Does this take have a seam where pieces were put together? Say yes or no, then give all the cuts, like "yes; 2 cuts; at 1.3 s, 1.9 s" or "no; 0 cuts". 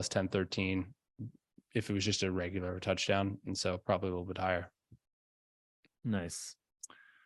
no; 0 cuts